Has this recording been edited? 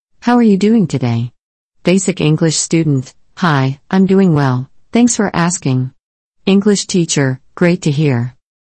no; 0 cuts

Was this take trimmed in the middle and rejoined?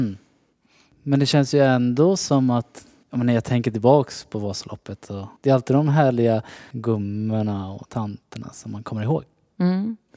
yes; 1 cut; at 5.4 s

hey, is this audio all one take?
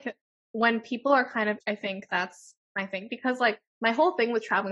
no; 2 cuts; at 1.6 s, 2.6 s

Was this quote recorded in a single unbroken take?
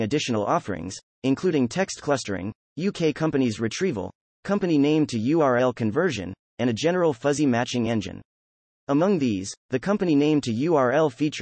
yes; 0 cuts

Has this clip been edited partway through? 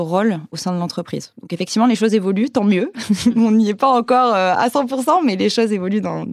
no; 0 cuts

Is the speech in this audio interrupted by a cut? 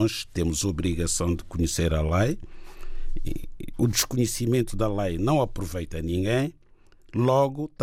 no; 0 cuts

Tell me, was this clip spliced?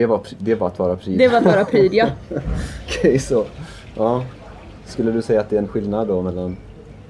no; 0 cuts

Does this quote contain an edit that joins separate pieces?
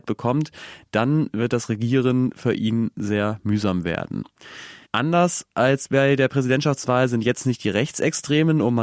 yes; 1 cut; at 4.8 s

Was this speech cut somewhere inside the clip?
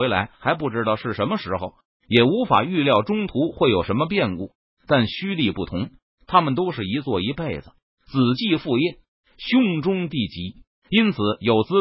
no; 0 cuts

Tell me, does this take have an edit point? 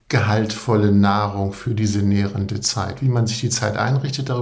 no; 0 cuts

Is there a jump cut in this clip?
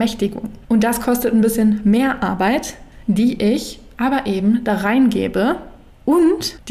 no; 0 cuts

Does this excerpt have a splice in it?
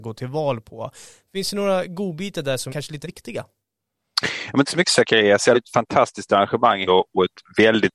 yes; 5 cuts; at 2.7 s, 3.0 s, 4.6 s, 5.5 s, 6.9 s

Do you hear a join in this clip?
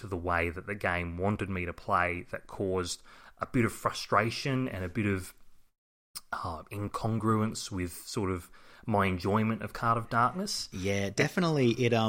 no; 0 cuts

